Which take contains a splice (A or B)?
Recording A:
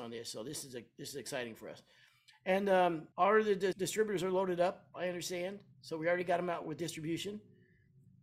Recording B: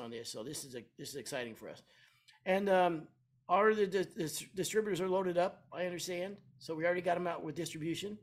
A